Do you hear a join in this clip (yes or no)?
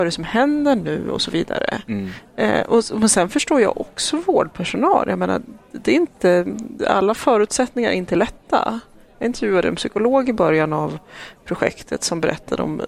no